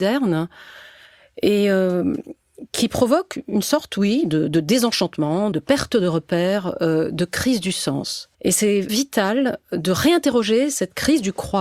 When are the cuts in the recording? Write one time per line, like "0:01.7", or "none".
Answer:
0:05.5
0:08.3
0:08.9